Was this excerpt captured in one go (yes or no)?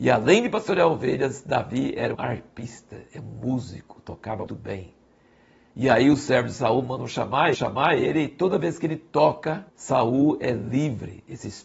no